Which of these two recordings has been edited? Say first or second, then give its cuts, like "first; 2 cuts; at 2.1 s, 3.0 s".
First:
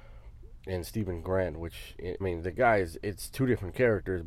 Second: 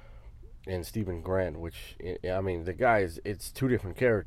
first; 1 cut; at 2.2 s